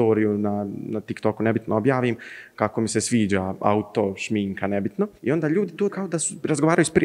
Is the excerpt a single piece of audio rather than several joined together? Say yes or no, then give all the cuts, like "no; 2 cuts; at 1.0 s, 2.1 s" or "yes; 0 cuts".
no; 2 cuts; at 5.2 s, 5.9 s